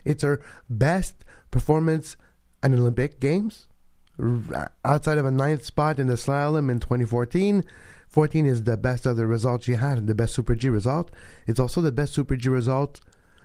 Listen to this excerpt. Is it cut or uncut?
uncut